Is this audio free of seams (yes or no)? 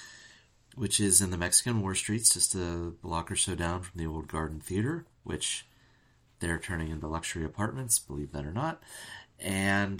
yes